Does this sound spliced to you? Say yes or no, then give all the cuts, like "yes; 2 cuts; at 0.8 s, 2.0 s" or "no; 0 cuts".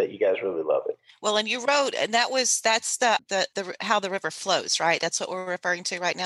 yes; 2 cuts; at 3.2 s, 3.5 s